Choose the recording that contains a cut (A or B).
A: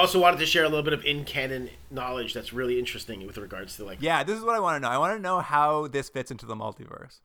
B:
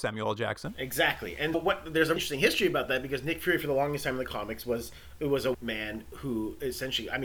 B